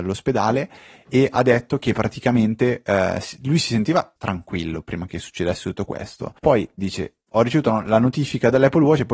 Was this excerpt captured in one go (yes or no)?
no